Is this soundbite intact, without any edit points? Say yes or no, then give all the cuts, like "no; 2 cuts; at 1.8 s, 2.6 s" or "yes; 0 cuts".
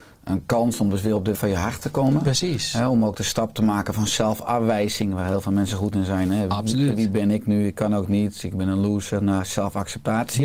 no; 1 cut; at 1.3 s